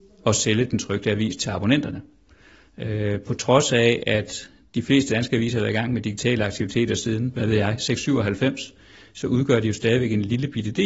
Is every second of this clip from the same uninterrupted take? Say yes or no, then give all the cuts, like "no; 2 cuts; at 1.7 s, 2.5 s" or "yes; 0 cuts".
yes; 0 cuts